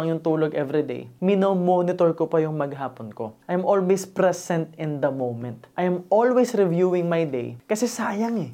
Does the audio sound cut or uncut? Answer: cut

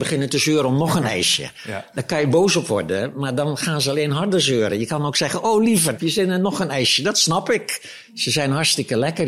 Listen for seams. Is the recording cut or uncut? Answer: cut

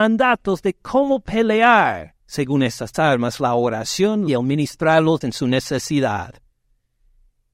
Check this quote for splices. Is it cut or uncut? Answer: cut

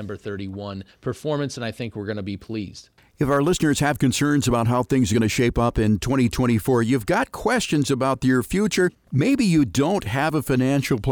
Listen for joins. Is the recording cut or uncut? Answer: uncut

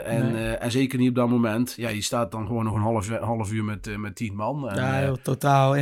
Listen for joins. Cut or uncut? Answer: uncut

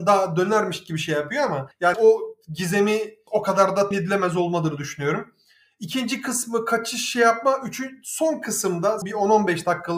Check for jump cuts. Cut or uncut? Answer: cut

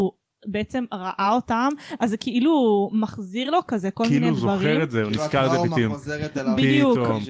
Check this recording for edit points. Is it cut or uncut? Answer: uncut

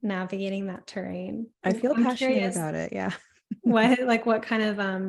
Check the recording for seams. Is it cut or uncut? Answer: cut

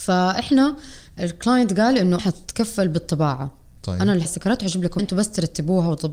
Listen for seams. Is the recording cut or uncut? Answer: cut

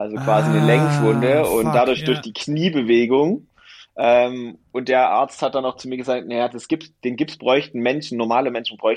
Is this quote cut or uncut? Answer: uncut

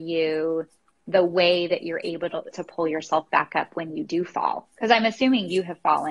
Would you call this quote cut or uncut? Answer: cut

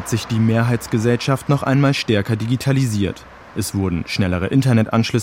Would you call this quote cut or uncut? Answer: uncut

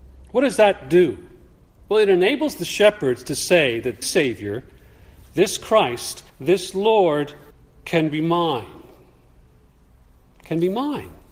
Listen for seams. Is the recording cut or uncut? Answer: cut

